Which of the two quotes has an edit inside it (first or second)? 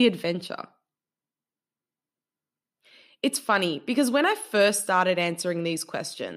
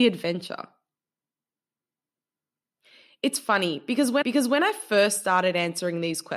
second